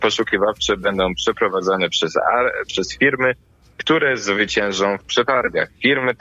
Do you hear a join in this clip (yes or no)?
no